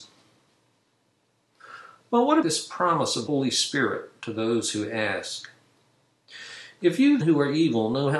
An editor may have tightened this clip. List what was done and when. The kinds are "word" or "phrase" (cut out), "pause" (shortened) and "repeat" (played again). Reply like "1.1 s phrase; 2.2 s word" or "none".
2.4 s word; 3.3 s word; 7.2 s word